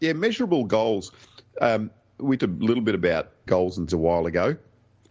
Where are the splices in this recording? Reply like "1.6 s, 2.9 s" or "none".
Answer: 2.4 s, 3.5 s, 3.9 s